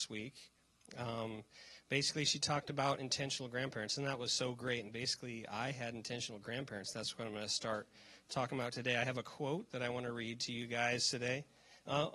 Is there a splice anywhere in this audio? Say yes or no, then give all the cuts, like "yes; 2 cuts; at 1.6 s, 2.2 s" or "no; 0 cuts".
no; 0 cuts